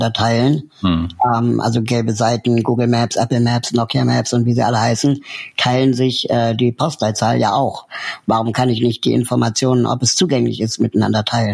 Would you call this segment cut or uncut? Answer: uncut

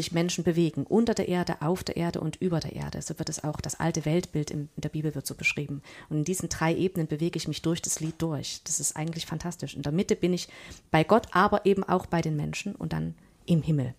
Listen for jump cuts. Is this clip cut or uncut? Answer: uncut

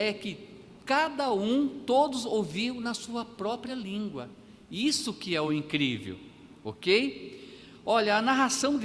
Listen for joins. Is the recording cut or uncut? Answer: uncut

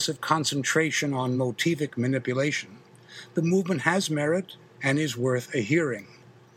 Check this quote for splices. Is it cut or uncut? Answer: uncut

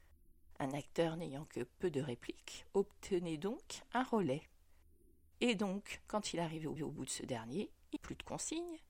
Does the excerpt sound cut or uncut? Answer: cut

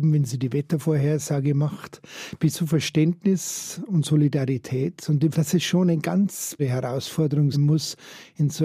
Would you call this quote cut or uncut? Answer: cut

